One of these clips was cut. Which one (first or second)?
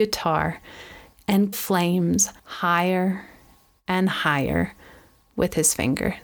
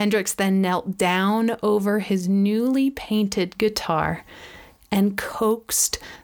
first